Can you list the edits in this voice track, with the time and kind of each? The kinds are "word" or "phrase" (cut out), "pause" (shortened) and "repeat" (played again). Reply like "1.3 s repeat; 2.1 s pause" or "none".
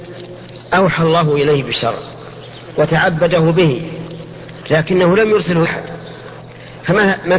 5.6 s word